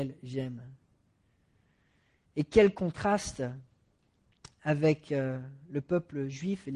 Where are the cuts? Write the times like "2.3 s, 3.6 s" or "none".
none